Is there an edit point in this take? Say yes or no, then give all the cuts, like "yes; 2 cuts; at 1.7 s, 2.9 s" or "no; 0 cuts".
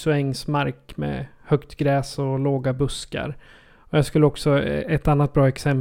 no; 0 cuts